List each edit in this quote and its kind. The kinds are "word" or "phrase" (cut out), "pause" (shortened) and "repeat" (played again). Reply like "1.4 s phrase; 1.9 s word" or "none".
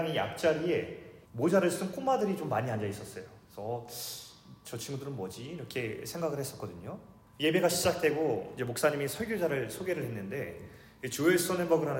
1.3 s pause; 3.4 s pause; 7.3 s pause